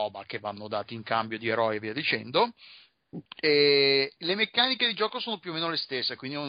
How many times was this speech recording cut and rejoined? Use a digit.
1